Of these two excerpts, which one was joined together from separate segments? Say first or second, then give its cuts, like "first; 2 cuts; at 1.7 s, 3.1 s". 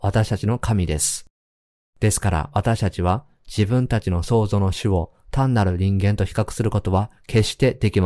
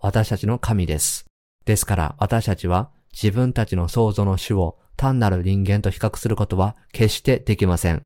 second; 1 cut; at 1.4 s